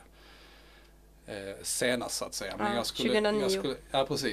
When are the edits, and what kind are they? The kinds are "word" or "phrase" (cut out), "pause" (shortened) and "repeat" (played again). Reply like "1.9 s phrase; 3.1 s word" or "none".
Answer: none